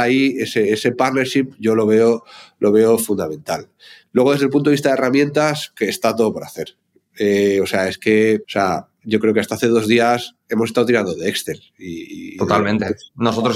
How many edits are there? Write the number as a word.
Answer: two